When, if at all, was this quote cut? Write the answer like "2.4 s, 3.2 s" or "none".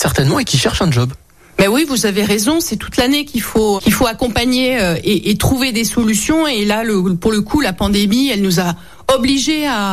3.8 s